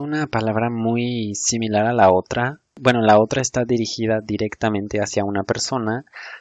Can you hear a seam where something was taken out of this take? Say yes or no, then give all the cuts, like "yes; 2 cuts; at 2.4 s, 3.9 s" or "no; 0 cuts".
no; 0 cuts